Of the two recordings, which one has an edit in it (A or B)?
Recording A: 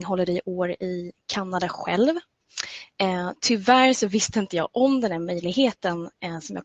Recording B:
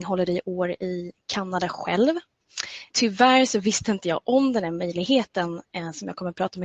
B